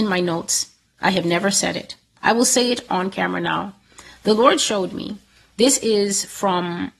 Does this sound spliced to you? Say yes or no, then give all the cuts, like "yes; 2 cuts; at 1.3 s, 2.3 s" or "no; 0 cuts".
no; 0 cuts